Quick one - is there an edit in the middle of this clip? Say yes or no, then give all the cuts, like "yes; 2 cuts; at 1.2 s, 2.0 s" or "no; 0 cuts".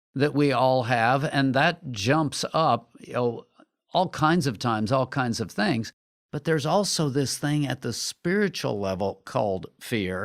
no; 0 cuts